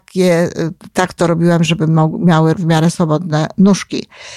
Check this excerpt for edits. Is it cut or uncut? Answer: cut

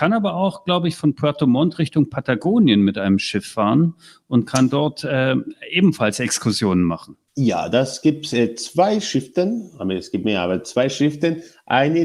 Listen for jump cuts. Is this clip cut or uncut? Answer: cut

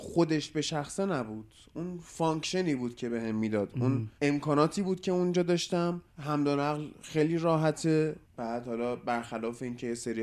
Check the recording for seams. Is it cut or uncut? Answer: cut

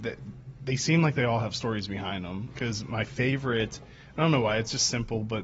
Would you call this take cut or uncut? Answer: uncut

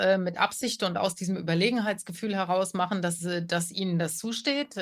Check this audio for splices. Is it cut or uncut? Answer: uncut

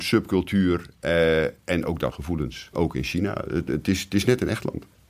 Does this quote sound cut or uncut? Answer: cut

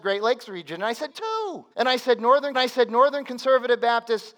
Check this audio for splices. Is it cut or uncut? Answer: cut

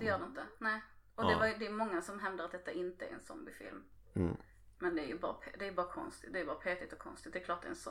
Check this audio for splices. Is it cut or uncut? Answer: uncut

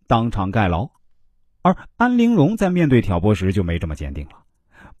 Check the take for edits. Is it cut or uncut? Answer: uncut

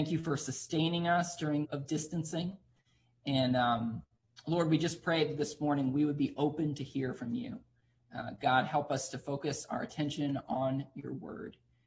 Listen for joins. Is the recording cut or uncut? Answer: cut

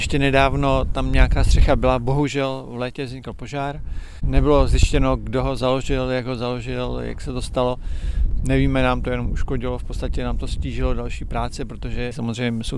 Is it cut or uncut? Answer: uncut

